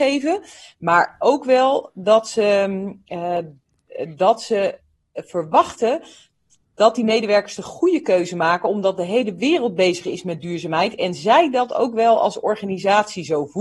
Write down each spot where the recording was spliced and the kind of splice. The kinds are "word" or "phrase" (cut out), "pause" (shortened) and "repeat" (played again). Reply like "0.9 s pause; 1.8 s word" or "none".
none